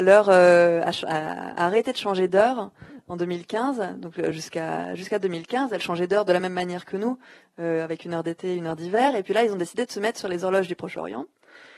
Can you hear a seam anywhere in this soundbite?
no; 0 cuts

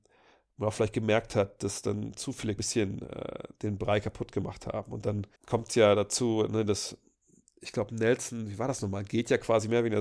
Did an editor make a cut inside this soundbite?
yes; 2 cuts; at 2.6 s, 5.4 s

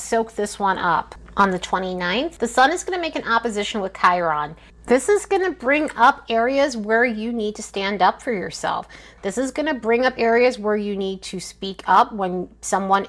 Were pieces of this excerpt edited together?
no; 0 cuts

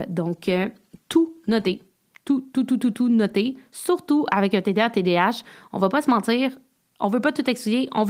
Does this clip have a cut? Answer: no; 0 cuts

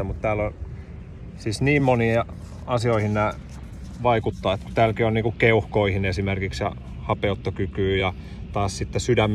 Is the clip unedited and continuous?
yes; 0 cuts

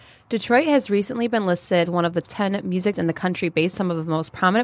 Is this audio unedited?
no; 4 cuts; at 1.9 s, 2.2 s, 2.9 s, 3.7 s

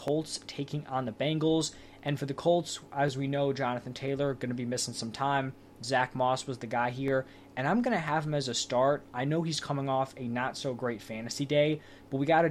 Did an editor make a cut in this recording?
no; 0 cuts

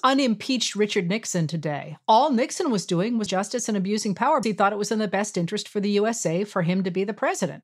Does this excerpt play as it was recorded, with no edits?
no; 2 cuts; at 3.3 s, 4.4 s

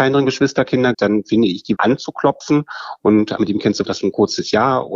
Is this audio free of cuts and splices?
no; 4 cuts; at 0.9 s, 1.8 s, 3.4 s, 3.8 s

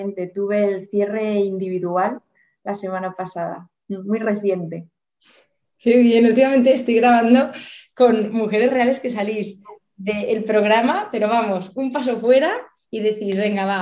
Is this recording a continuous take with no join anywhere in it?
yes; 0 cuts

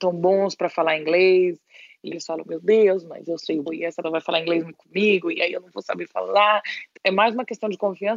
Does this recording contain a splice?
yes; 5 cuts; at 2.1 s, 3.7 s, 4.0 s, 4.7 s, 7.0 s

